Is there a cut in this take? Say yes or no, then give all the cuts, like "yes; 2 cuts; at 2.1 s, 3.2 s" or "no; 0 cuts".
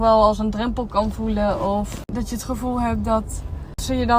no; 0 cuts